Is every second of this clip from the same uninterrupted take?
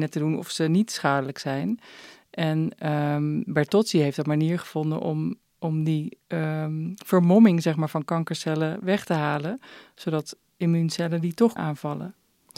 no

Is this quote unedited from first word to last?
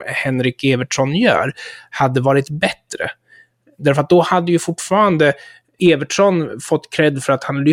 yes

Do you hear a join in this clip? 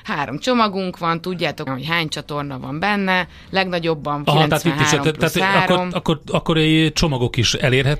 yes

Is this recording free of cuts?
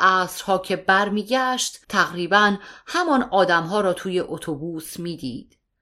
no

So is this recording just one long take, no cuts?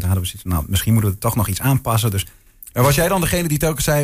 yes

